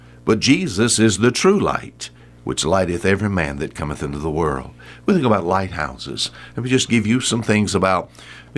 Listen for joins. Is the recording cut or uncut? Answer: uncut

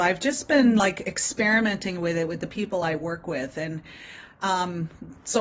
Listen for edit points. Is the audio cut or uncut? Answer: uncut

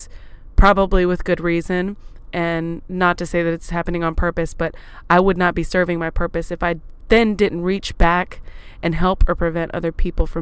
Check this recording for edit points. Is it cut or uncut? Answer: uncut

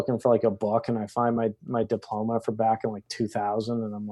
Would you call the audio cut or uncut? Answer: uncut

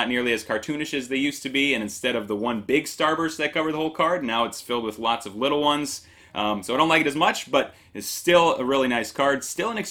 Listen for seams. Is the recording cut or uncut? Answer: uncut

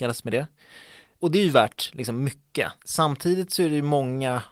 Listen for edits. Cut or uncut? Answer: cut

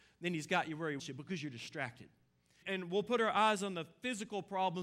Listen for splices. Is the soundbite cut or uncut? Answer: cut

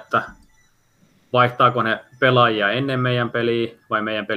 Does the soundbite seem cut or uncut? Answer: uncut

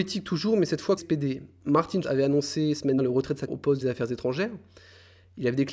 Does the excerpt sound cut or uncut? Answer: cut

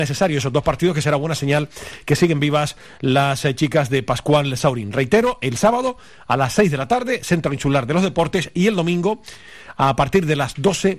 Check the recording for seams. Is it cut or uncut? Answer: uncut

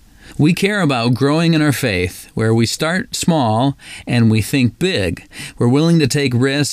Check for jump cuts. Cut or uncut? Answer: uncut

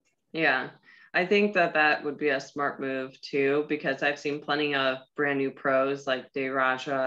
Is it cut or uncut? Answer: uncut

